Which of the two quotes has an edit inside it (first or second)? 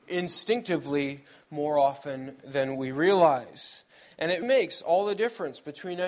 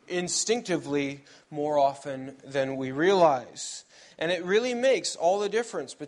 first